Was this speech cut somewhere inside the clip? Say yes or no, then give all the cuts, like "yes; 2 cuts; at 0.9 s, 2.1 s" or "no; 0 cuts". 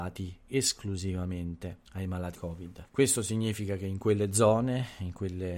yes; 3 cuts; at 1.9 s, 2.3 s, 2.9 s